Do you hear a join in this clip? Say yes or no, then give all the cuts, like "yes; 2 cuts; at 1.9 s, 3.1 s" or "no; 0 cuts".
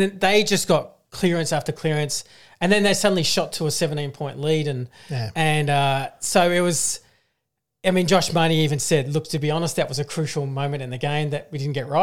no; 0 cuts